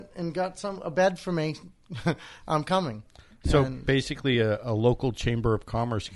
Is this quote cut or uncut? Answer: uncut